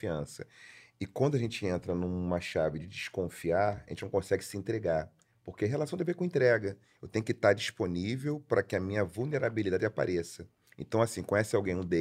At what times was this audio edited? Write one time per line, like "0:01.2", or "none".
none